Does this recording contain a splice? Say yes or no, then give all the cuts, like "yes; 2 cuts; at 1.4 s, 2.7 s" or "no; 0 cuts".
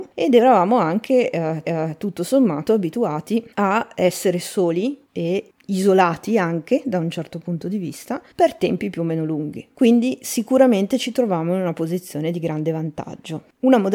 yes; 4 cuts; at 1.6 s, 3.5 s, 5.1 s, 8.3 s